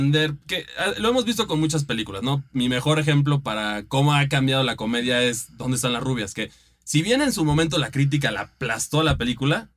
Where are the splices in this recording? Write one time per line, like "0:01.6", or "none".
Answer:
none